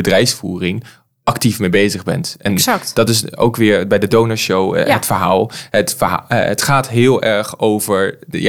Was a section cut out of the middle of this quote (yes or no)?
no